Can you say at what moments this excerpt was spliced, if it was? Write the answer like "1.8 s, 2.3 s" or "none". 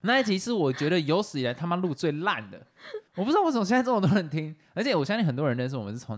3.1 s